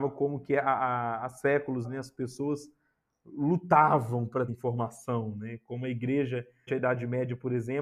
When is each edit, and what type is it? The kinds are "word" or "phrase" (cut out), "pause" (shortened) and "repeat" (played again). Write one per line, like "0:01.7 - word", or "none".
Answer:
0:01.8 - word
0:04.5 - word
0:06.7 - word